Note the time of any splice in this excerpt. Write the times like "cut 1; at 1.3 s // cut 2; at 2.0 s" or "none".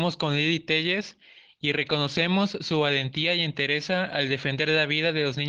none